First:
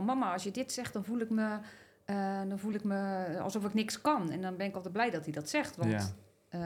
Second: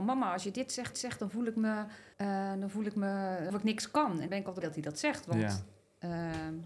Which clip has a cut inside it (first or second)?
second